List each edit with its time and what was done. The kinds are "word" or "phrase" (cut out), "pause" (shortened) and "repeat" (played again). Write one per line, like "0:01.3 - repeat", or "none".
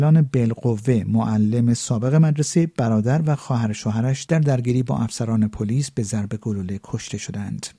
none